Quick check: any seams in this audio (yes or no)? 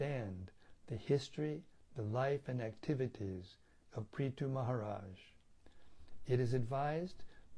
no